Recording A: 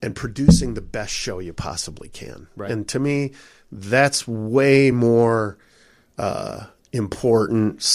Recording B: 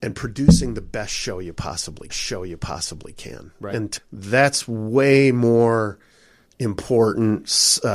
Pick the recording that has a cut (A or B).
B